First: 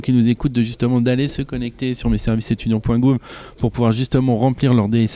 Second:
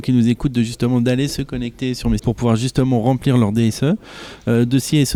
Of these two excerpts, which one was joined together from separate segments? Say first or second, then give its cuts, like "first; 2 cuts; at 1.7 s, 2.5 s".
second; 1 cut; at 2.2 s